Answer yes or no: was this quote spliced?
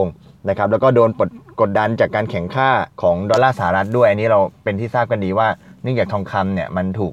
yes